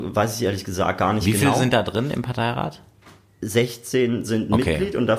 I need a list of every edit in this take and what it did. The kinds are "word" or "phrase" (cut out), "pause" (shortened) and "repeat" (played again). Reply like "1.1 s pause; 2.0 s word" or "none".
none